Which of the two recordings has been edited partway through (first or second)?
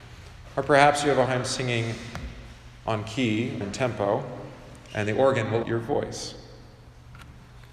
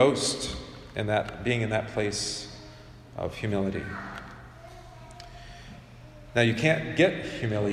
first